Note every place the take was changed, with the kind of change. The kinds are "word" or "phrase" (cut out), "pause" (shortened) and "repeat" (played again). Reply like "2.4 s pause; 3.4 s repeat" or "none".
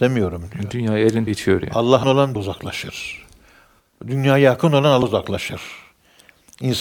1.3 s word; 2.0 s word; 2.4 s word; 5.0 s word